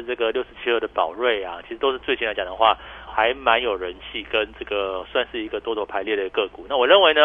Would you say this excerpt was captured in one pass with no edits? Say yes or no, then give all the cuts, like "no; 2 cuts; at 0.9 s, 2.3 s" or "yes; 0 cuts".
no; 1 cut; at 3.1 s